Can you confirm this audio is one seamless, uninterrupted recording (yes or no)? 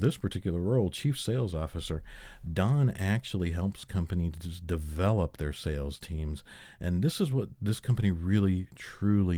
yes